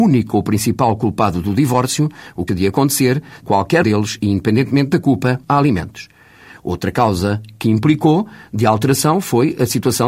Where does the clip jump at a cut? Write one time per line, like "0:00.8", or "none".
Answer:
0:02.5
0:03.4
0:03.8
0:05.4